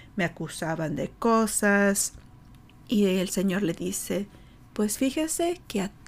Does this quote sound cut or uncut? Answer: uncut